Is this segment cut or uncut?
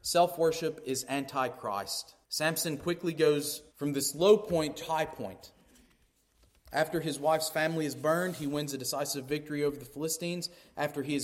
cut